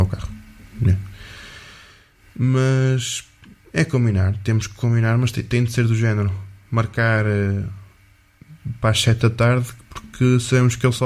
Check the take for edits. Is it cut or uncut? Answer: cut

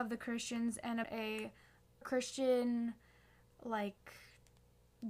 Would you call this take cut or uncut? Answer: cut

